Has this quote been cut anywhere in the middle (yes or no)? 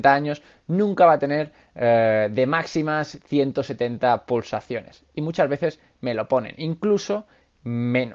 no